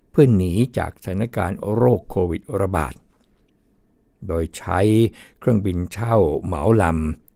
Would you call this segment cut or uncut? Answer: uncut